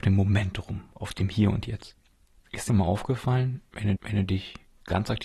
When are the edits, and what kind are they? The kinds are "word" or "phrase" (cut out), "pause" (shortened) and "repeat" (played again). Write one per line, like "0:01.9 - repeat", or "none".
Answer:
0:02.7 - word
0:04.0 - repeat